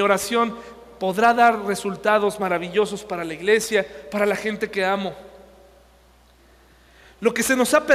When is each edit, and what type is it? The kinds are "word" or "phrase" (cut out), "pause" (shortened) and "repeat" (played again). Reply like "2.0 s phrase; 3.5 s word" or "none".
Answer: none